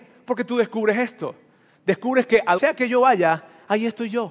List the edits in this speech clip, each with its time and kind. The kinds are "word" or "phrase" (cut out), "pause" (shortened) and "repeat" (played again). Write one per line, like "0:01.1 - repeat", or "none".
0:02.6 - word